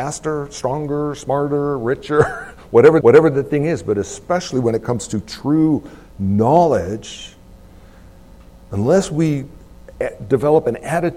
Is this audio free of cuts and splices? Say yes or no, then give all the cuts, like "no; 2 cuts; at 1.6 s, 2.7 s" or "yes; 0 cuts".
no; 1 cut; at 3.0 s